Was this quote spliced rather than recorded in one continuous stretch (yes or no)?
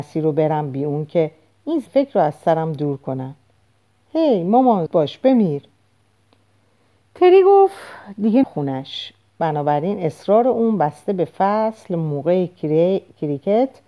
yes